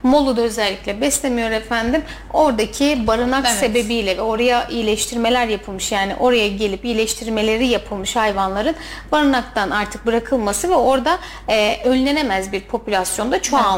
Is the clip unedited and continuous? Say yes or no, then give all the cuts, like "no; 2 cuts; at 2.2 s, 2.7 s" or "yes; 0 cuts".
yes; 0 cuts